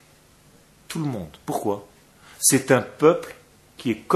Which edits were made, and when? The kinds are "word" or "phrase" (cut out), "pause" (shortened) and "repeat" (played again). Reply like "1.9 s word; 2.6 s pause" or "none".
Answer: none